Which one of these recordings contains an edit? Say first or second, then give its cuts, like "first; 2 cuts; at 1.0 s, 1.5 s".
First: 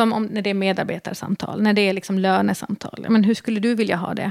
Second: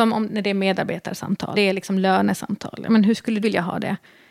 second; 2 cuts; at 1.5 s, 3.4 s